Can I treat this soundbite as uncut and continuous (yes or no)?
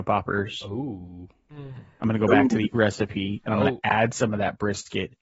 no